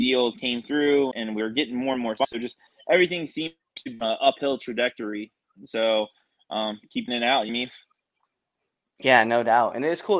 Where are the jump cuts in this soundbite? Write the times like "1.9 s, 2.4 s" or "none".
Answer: 1.1 s, 4.0 s, 7.1 s, 7.5 s

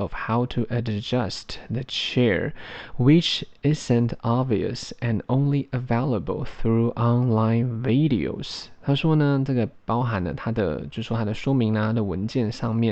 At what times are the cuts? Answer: none

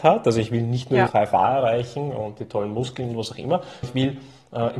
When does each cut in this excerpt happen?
1.1 s, 3.8 s

